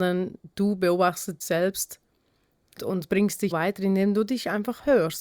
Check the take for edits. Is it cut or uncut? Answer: cut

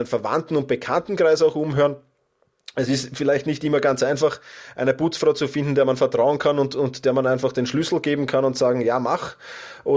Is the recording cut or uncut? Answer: uncut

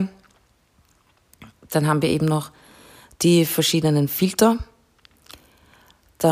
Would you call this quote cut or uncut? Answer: uncut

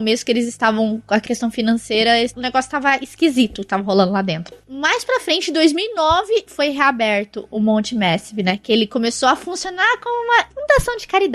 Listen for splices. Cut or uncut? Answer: uncut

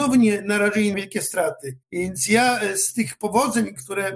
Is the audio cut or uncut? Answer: cut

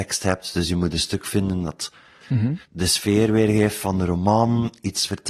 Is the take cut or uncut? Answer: cut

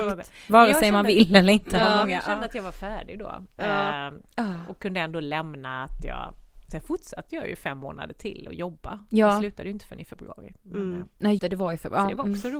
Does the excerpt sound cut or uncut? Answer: cut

